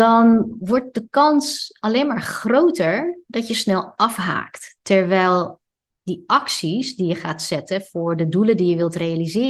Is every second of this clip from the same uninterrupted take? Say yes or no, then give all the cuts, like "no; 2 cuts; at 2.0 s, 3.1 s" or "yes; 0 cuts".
yes; 0 cuts